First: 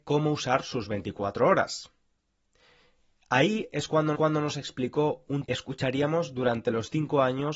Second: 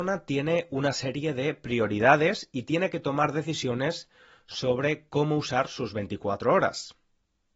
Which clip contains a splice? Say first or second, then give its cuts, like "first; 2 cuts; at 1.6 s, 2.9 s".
first; 2 cuts; at 4.1 s, 5.5 s